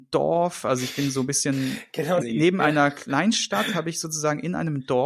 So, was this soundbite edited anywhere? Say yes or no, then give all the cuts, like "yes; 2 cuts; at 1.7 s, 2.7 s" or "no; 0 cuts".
yes; 1 cut; at 2.2 s